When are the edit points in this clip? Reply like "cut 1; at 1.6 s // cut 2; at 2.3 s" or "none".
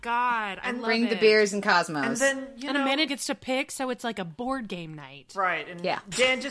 cut 1; at 3.1 s